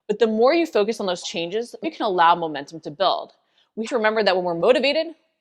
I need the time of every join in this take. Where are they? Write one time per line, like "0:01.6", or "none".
0:01.2
0:01.8
0:03.9